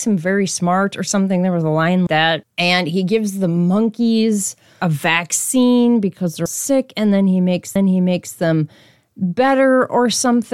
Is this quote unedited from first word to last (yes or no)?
no